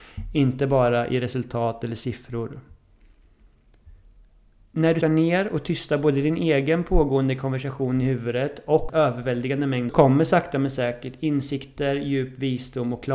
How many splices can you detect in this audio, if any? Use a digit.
3